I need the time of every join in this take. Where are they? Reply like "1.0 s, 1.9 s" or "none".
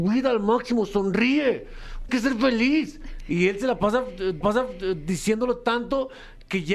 2.1 s, 4.4 s